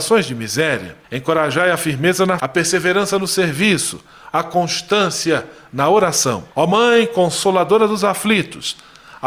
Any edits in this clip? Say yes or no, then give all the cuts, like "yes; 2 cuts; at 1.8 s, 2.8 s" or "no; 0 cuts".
yes; 3 cuts; at 1.0 s, 2.4 s, 6.5 s